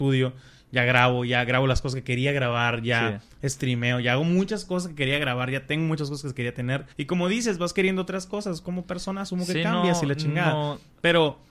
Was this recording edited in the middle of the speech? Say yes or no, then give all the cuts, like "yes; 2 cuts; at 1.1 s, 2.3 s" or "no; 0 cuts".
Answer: yes; 1 cut; at 6.9 s